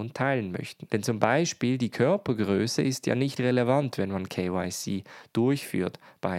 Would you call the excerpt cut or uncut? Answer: cut